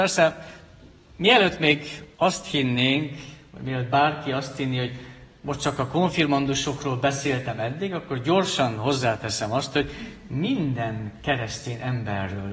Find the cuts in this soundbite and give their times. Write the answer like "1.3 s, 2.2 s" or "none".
2.1 s